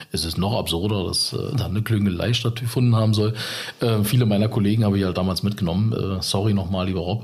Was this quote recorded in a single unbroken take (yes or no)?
yes